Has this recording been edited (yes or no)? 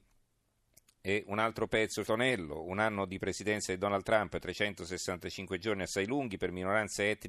yes